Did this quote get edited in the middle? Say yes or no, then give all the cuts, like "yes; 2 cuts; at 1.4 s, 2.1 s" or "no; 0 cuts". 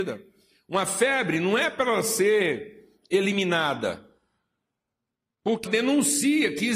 yes; 1 cut; at 5.7 s